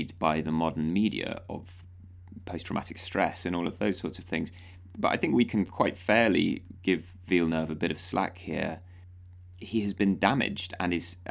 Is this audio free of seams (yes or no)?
yes